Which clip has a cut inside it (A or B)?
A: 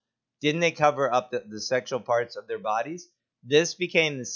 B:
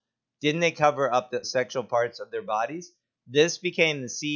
B